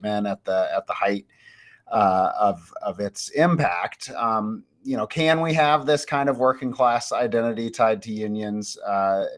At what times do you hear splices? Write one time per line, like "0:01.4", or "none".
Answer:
none